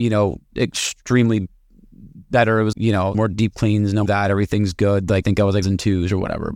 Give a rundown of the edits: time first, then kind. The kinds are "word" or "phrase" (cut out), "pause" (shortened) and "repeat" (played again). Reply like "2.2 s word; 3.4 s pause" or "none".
2.7 s word; 3.1 s word; 4.1 s word; 5.2 s word; 5.6 s word